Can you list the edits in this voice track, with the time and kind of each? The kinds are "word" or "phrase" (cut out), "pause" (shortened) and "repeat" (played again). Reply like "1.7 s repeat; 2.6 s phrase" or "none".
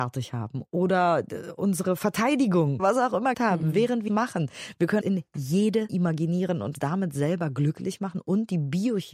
2.8 s word; 3.3 s word; 4.1 s word; 5.0 s word; 5.9 s word; 6.7 s word